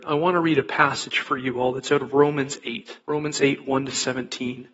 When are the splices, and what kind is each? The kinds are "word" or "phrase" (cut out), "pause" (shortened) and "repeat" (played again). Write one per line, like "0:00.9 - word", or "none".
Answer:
0:03.0 - pause